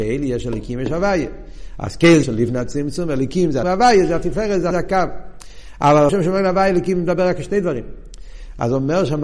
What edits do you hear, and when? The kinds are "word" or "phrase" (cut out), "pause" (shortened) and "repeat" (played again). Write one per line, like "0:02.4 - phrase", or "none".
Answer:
0:02.2 - word
0:03.6 - word
0:04.7 - word
0:06.1 - word